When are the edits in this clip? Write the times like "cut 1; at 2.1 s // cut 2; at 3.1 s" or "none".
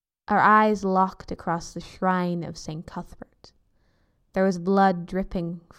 none